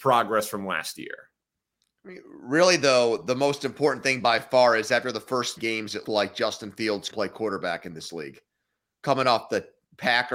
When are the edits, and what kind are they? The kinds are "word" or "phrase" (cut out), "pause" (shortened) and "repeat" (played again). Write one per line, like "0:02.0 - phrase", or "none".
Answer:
0:05.6 - word
0:06.0 - word
0:07.1 - word